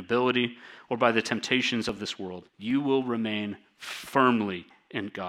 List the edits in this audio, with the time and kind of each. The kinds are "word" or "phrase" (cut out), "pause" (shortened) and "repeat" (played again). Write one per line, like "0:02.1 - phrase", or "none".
0:02.5 - pause